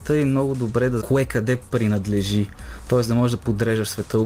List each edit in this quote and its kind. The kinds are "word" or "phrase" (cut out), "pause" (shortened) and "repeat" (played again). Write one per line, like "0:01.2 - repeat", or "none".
0:01.0 - word